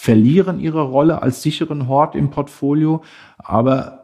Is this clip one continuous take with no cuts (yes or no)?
yes